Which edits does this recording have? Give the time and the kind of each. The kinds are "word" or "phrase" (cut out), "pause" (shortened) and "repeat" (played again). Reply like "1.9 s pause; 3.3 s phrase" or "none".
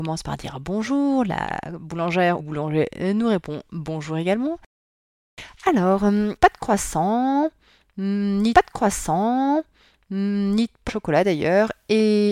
2.4 s phrase; 6.4 s phrase; 8.5 s repeat; 10.9 s word